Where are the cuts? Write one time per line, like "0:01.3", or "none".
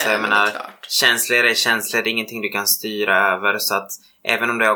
none